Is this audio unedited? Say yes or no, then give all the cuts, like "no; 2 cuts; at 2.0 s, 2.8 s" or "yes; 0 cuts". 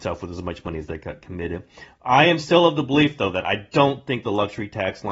yes; 0 cuts